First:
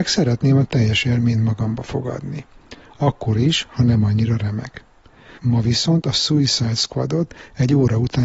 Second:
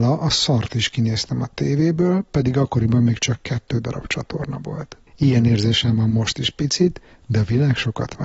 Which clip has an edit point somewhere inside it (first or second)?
second